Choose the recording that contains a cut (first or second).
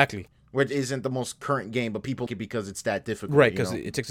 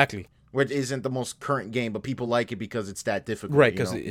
first